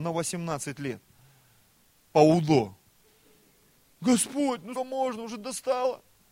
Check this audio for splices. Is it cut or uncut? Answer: cut